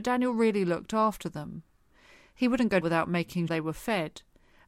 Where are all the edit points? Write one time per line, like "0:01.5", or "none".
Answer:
0:02.8
0:03.5